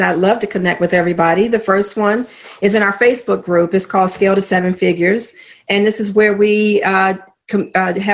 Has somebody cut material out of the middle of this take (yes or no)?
no